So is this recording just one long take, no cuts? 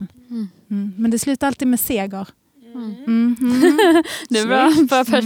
yes; 0 cuts

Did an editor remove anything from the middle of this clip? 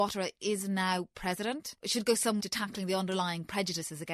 yes; 1 cut; at 2.4 s

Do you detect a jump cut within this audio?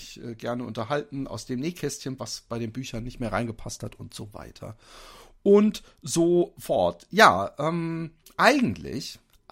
yes; 1 cut; at 2.2 s

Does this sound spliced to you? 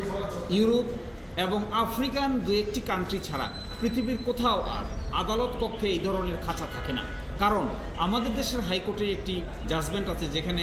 no; 0 cuts

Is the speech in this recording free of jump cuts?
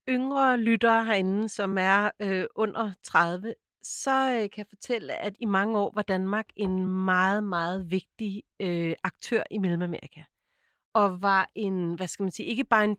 yes; 0 cuts

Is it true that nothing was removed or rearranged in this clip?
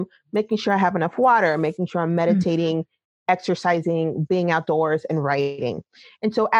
yes; 0 cuts

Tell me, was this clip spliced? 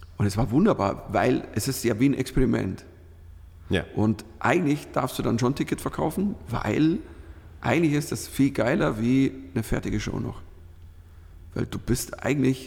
no; 0 cuts

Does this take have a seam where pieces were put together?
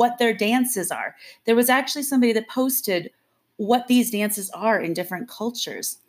no; 0 cuts

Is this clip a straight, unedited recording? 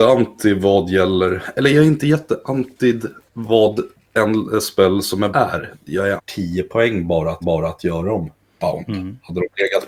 no; 4 cuts; at 3.3 s, 5.3 s, 6.2 s, 7.4 s

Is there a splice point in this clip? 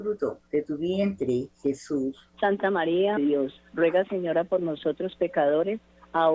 yes; 2 cuts; at 2.3 s, 3.2 s

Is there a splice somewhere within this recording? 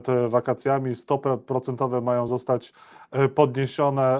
no; 0 cuts

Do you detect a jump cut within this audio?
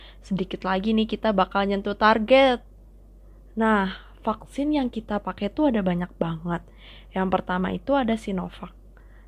no; 0 cuts

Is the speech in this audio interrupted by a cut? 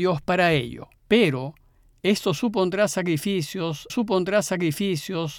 yes; 2 cuts; at 1.0 s, 3.9 s

